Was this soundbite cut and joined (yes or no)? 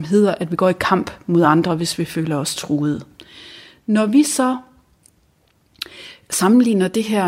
no